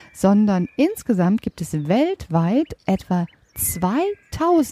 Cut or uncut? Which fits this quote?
uncut